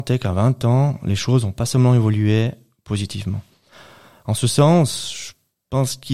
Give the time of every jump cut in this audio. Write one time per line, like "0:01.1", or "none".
none